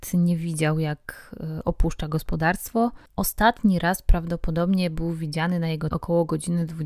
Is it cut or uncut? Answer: cut